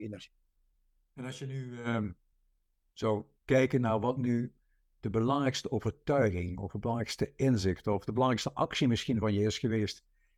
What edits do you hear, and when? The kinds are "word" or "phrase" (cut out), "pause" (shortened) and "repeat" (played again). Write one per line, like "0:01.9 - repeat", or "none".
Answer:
0:02.3 - pause